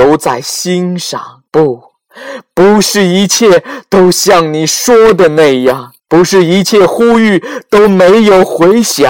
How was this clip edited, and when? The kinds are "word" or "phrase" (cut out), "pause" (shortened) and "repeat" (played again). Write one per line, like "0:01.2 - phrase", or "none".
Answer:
0:01.5 - pause
0:06.0 - pause